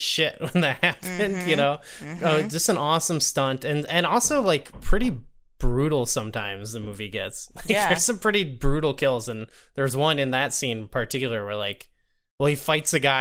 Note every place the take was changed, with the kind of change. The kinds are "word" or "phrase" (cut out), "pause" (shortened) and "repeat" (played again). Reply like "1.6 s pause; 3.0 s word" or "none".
none